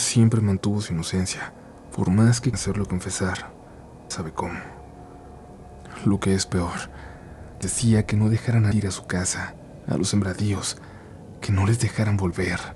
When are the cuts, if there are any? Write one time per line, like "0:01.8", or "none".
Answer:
0:02.5
0:04.1
0:07.6
0:08.7